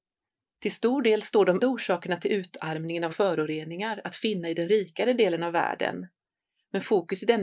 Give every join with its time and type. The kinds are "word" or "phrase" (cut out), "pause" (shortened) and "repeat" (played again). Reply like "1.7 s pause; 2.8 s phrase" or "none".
1.6 s word; 3.1 s phrase